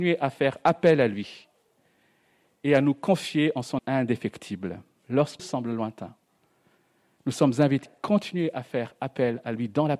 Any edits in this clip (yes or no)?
yes